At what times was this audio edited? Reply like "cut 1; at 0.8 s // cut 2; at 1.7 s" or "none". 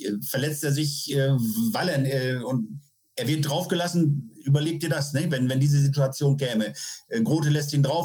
none

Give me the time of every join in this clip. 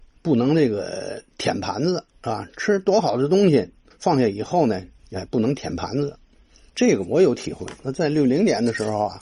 cut 1; at 2.1 s // cut 2; at 3.9 s

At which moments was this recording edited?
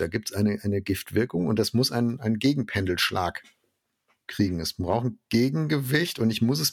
none

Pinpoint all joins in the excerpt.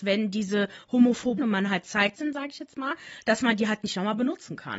cut 1; at 1.4 s // cut 2; at 2.1 s

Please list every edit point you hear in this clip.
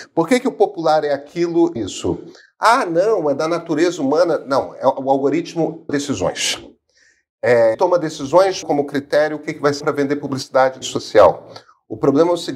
cut 1; at 1.8 s // cut 2; at 5.9 s // cut 3; at 7.7 s // cut 4; at 8.6 s // cut 5; at 9.8 s // cut 6; at 10.8 s

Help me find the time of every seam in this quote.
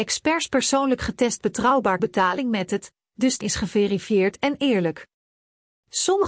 cut 1; at 2.0 s // cut 2; at 3.4 s

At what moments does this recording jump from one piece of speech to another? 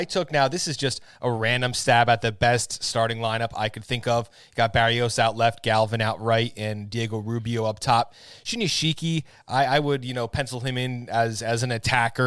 none

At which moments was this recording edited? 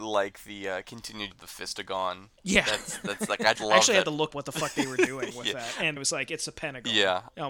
cut 1; at 1.3 s // cut 2; at 2.4 s // cut 3; at 3.6 s // cut 4; at 4.3 s // cut 5; at 6.0 s

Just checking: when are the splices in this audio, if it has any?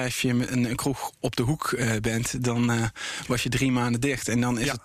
none

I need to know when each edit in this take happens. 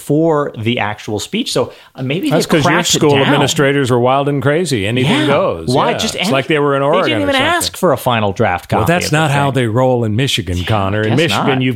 none

